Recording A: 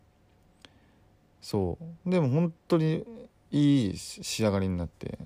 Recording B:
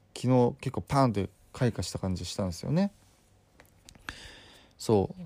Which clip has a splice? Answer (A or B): A